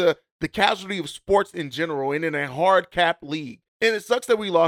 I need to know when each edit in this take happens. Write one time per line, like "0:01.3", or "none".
0:03.7